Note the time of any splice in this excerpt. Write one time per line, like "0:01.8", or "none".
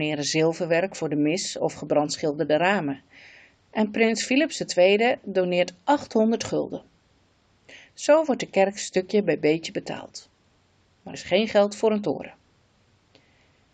0:11.1